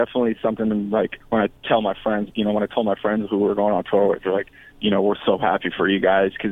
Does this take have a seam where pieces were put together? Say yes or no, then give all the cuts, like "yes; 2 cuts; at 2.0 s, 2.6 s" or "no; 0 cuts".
yes; 1 cut; at 2.3 s